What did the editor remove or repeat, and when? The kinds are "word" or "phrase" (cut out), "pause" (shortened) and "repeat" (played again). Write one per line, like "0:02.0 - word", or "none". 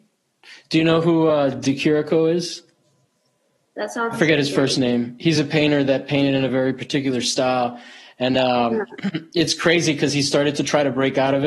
none